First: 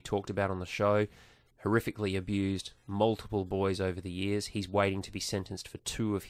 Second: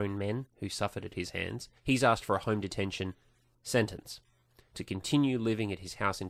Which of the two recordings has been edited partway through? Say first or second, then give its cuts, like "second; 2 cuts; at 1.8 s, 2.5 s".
second; 1 cut; at 1.8 s